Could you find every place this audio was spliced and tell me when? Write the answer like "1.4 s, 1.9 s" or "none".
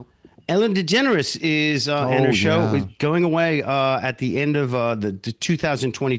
none